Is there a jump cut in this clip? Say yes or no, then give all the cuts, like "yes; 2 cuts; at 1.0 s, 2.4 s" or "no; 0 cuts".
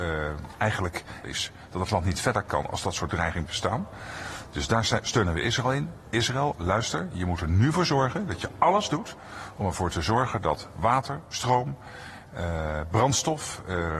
yes; 2 cuts; at 1.2 s, 3.5 s